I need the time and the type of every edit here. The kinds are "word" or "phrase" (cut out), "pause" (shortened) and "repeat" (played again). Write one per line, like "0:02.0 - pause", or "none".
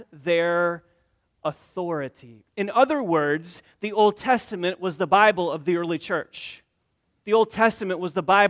none

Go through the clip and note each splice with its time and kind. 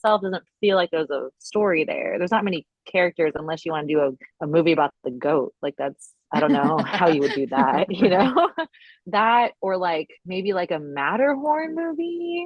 0:01.3 - pause
0:05.0 - pause

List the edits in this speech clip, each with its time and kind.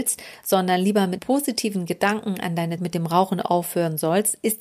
0:01.2 - word
0:02.8 - word

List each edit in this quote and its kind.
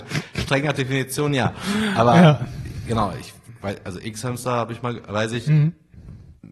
none

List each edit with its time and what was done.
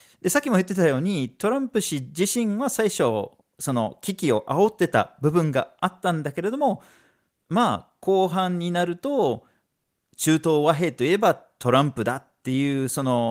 none

